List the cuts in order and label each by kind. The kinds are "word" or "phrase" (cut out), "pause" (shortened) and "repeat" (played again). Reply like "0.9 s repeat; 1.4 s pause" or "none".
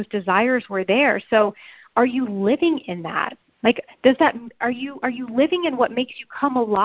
none